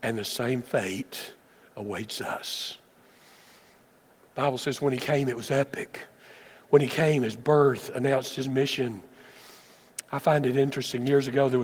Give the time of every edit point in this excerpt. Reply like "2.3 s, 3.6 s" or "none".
none